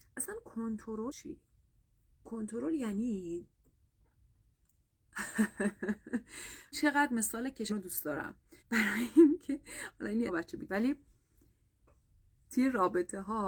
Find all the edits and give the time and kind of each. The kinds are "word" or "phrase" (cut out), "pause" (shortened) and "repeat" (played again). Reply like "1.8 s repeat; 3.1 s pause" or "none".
1.1 s word; 6.7 s word; 7.7 s word; 8.6 s pause; 10.3 s phrase; 10.7 s word